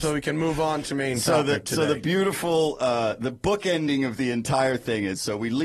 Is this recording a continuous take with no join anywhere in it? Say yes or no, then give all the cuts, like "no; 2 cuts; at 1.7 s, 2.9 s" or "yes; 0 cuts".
no; 1 cut; at 0.9 s